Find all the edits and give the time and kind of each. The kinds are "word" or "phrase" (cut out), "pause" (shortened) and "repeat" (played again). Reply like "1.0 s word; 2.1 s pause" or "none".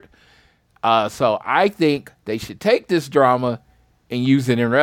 none